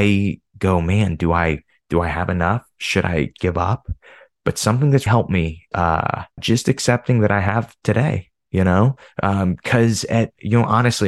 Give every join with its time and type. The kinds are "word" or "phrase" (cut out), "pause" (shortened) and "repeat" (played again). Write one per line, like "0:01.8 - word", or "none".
0:03.4 - word
0:05.1 - word
0:05.7 - word
0:06.4 - word